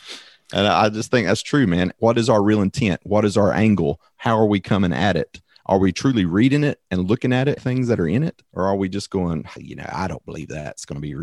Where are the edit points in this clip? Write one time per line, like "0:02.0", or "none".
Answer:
0:07.6
0:08.5
0:09.6